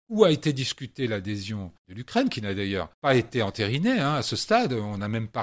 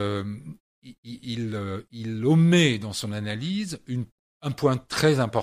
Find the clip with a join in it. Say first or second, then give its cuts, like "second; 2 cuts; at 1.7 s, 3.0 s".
first; 2 cuts; at 1.8 s, 2.9 s